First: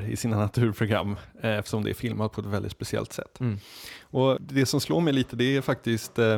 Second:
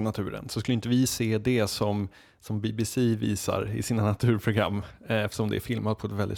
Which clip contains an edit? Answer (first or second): first